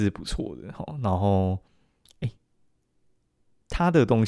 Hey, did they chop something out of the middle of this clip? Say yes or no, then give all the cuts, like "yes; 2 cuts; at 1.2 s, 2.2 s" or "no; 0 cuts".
no; 0 cuts